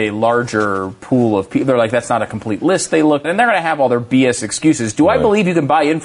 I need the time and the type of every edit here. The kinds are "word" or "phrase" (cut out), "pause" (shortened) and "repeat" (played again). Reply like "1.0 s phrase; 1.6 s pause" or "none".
3.2 s word

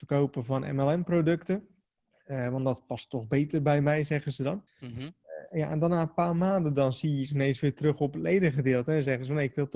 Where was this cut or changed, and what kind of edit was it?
2.0 s pause; 4.7 s pause

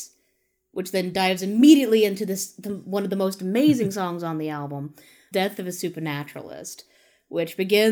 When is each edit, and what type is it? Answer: 5.3 s word

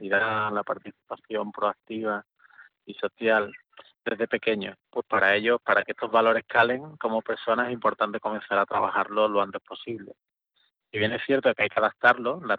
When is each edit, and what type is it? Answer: 4.8 s phrase

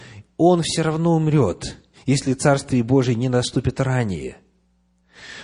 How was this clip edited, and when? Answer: none

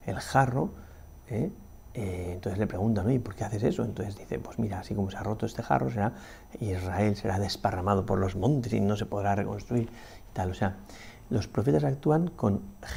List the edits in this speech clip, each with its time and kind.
8.7 s phrase

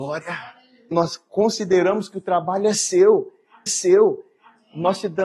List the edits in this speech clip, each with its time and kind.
0.9 s word; 3.7 s repeat

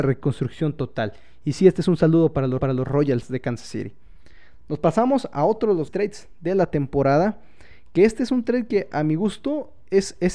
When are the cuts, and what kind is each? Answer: 2.6 s repeat; 5.9 s word

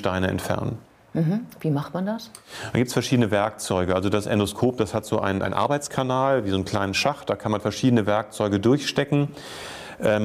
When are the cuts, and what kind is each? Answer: none

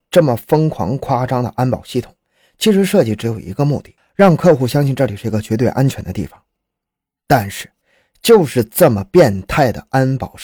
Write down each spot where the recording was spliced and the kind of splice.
none

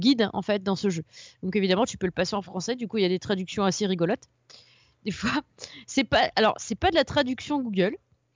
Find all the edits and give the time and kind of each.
none

